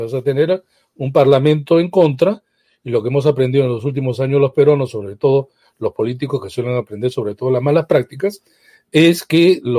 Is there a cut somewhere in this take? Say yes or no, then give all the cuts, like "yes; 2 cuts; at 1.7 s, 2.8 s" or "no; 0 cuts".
no; 0 cuts